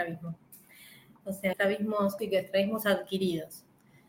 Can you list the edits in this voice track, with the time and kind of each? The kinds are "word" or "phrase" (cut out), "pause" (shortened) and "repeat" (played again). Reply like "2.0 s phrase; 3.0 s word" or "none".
1.5 s word; 2.2 s word